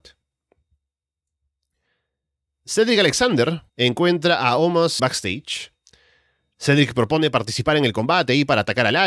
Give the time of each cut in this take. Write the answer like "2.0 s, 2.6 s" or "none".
3.7 s, 5.0 s